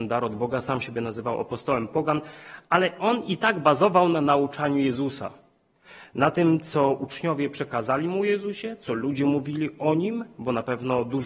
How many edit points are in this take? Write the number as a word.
zero